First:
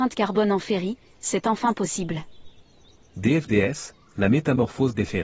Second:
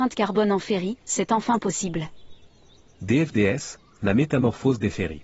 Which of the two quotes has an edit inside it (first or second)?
second